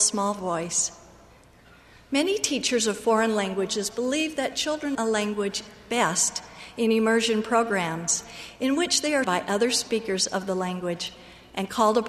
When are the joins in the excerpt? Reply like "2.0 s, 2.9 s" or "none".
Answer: 4.9 s, 9.2 s